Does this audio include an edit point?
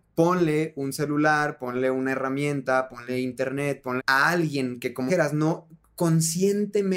yes; 2 cuts; at 4.0 s, 5.1 s

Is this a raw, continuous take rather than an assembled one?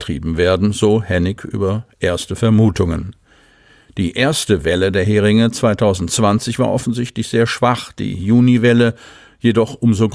yes; 0 cuts

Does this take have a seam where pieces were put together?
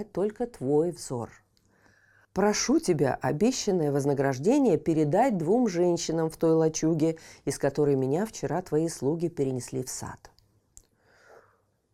no; 0 cuts

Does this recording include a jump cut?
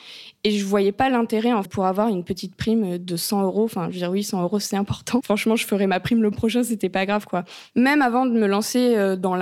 yes; 3 cuts; at 1.6 s, 5.2 s, 6.3 s

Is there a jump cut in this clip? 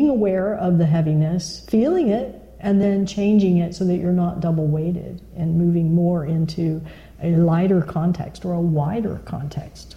no; 0 cuts

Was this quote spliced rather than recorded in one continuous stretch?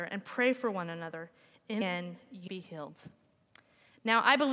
yes; 2 cuts; at 1.8 s, 2.5 s

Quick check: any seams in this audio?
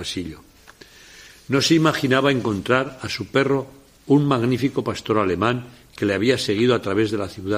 no; 0 cuts

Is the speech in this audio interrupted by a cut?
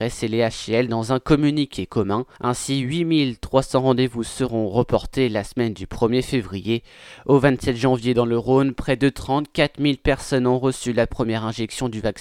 yes; 1 cut; at 2.3 s

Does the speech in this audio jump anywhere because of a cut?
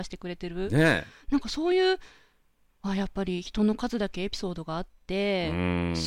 no; 0 cuts

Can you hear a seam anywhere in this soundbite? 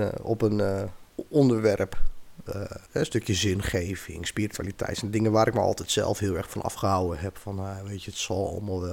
yes; 2 cuts; at 1.1 s, 2.8 s

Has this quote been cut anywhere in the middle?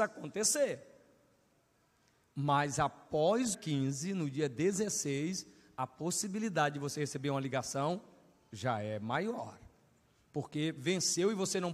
yes; 1 cut; at 3.5 s

